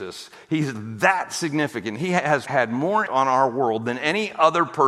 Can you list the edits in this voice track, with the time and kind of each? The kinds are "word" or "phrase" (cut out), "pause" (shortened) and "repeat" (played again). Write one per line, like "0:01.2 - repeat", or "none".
0:02.5 - word
0:03.1 - word